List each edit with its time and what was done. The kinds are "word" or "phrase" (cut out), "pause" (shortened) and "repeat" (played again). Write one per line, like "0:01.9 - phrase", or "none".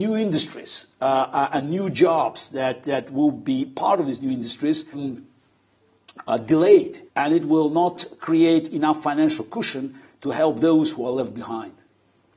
0:04.9 - word
0:07.1 - pause